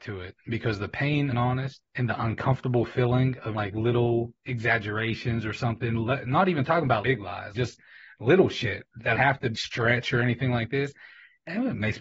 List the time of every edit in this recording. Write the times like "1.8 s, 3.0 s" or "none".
1.3 s, 1.9 s, 3.5 s, 4.4 s, 7.0 s, 7.5 s, 9.1 s, 9.5 s